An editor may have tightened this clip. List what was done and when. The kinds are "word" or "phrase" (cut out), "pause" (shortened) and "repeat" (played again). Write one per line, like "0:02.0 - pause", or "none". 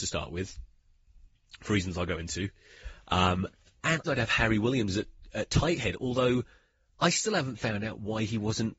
0:04.0 - phrase